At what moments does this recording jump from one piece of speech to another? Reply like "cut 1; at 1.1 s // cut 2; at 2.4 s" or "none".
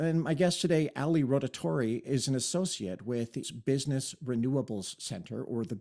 cut 1; at 3.4 s